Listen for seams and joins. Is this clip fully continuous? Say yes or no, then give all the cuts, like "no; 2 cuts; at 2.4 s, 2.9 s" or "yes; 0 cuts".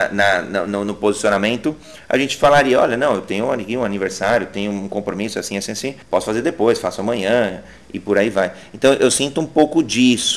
yes; 0 cuts